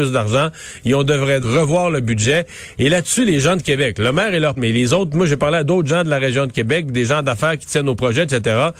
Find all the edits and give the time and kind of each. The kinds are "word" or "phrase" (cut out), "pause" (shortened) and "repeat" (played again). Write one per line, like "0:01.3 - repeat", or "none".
0:01.4 - word
0:04.6 - word